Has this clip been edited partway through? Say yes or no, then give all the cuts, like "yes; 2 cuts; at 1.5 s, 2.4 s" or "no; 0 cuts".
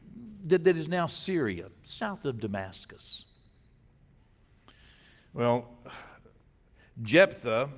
no; 0 cuts